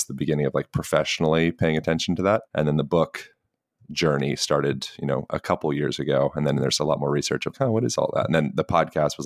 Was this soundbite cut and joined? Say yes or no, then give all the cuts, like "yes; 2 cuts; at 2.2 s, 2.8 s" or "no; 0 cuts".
yes; 2 cuts; at 2.5 s, 7.5 s